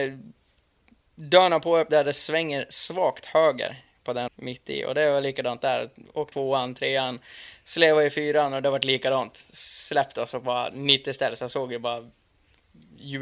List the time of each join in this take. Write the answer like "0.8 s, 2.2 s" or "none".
4.3 s, 6.3 s